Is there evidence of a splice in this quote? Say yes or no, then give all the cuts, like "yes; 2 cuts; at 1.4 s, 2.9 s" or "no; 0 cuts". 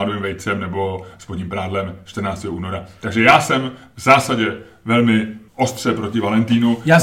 yes; 1 cut; at 5.5 s